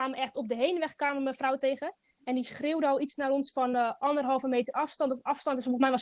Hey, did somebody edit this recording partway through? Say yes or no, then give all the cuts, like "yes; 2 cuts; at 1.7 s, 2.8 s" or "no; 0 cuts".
no; 0 cuts